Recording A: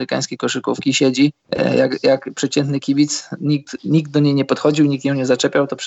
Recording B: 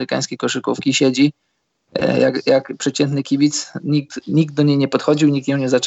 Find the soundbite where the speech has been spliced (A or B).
A